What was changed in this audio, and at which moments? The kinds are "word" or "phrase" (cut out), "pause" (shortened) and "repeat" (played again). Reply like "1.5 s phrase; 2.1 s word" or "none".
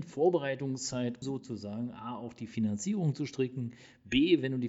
1.2 s word